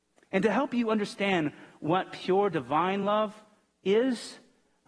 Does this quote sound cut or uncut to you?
uncut